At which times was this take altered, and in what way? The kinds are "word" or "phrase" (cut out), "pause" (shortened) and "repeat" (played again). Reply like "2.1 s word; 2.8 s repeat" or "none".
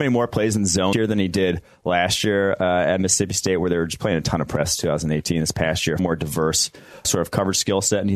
0.9 s word; 6.0 s word; 7.0 s word